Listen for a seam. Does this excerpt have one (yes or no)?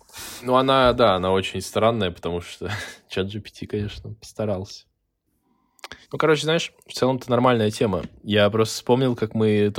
yes